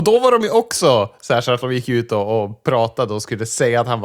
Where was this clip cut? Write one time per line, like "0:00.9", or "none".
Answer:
none